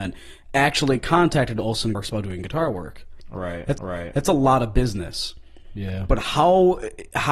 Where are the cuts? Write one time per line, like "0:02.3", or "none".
0:01.9
0:03.8